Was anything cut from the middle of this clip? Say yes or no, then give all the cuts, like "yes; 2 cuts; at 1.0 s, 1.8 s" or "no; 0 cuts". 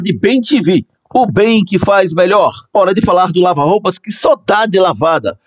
yes; 1 cut; at 2.7 s